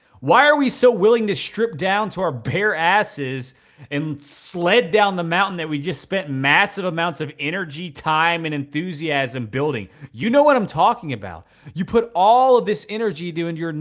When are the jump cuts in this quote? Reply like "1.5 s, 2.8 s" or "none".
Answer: none